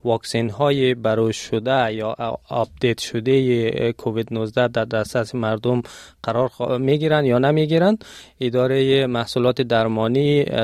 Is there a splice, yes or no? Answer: no